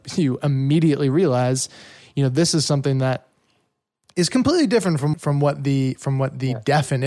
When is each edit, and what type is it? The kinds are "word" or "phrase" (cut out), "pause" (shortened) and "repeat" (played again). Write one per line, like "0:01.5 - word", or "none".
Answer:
0:05.1 - word